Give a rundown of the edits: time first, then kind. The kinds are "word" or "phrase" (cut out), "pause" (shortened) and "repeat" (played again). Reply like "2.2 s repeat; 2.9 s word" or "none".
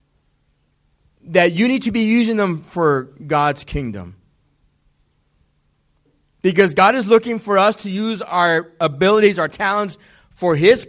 none